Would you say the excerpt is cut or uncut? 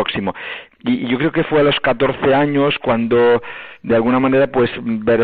uncut